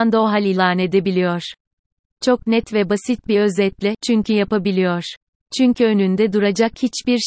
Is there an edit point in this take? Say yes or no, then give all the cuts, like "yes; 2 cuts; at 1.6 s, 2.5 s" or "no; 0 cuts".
no; 0 cuts